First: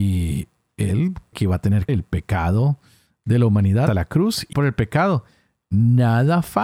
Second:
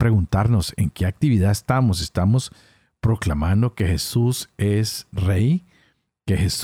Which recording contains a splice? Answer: first; 4 cuts; at 1.3 s, 1.9 s, 3.9 s, 4.5 s

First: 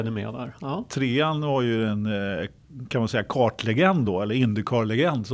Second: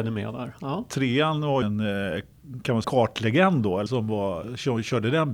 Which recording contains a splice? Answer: second; 3 cuts; at 1.6 s, 2.8 s, 3.9 s

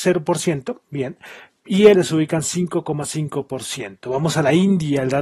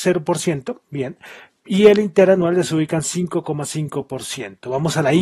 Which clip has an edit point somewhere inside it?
first; 1 cut; at 1.9 s

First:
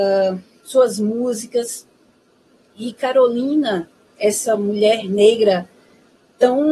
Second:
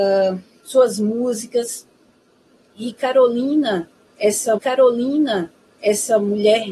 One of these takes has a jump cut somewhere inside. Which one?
second; 1 cut; at 4.6 s

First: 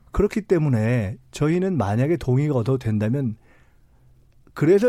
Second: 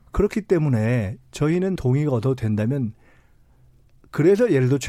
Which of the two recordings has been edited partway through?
second; 1 cut; at 1.8 s

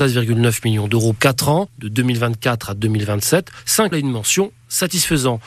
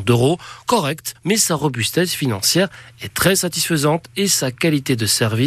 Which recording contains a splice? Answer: first; 2 cuts; at 1.2 s, 3.9 s

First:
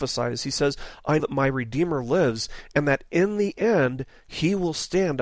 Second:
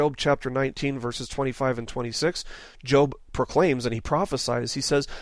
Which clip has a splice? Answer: first; 1 cut; at 1.2 s

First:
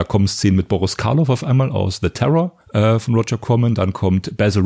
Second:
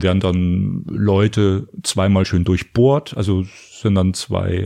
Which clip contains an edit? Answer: first; 1 cut; at 2.6 s

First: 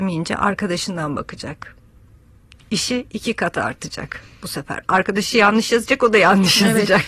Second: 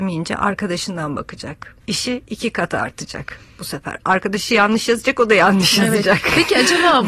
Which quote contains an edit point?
second; 1 cut; at 1.8 s

